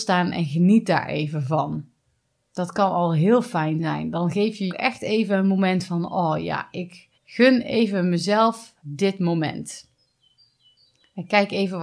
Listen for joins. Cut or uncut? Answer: cut